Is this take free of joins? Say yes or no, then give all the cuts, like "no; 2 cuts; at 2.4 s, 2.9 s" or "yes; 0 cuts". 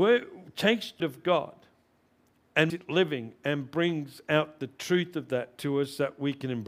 no; 2 cuts; at 1.0 s, 2.7 s